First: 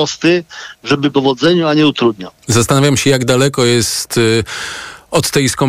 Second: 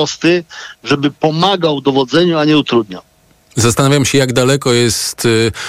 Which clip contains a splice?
first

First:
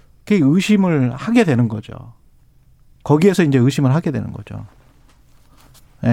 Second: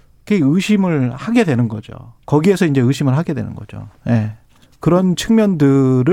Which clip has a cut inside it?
second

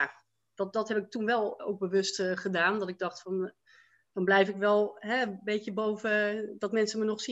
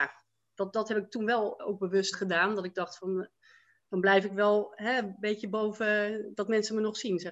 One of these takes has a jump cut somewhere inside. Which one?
second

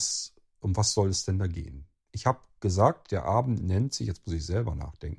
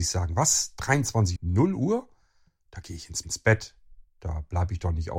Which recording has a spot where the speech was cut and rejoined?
second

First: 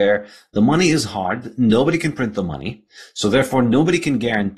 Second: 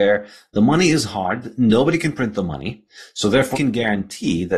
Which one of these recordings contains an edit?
second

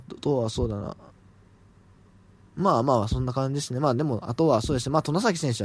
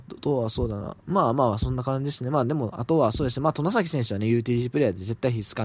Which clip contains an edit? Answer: second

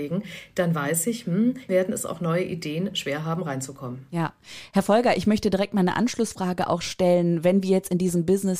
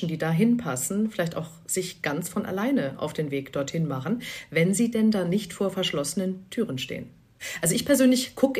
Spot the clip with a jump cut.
first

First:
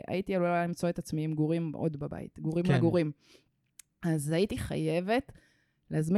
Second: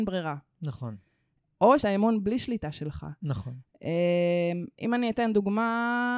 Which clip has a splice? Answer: second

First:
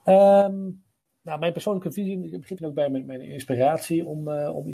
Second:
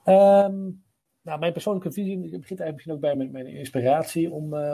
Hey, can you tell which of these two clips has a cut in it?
first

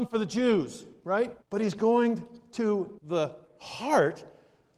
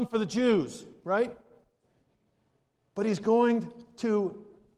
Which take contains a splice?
first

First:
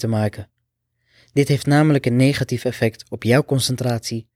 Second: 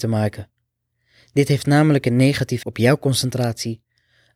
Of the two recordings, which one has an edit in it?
second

